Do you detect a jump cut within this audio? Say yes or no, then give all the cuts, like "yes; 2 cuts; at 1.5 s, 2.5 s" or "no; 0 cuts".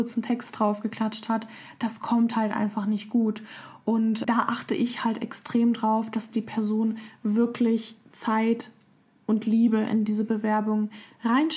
yes; 1 cut; at 4.2 s